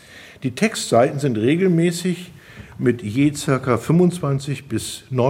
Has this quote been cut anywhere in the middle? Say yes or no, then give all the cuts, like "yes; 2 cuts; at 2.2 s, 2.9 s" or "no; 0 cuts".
no; 0 cuts